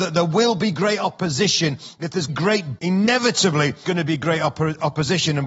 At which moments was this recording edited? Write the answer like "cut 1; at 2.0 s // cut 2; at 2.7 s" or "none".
cut 1; at 2.3 s // cut 2; at 2.8 s // cut 3; at 3.8 s